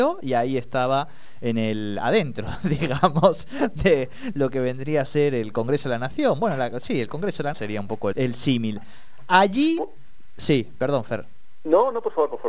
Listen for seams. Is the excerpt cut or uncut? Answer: cut